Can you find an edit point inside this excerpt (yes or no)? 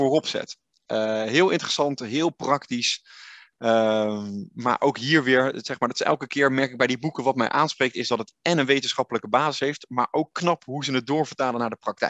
no